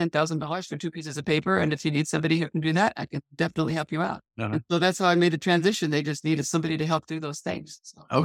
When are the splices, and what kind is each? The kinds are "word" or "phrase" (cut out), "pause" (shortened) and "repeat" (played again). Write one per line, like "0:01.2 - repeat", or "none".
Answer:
0:04.3 - pause